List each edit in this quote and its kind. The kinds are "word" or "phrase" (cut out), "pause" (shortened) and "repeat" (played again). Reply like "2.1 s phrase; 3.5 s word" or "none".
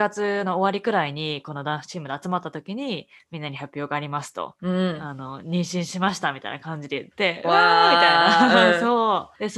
none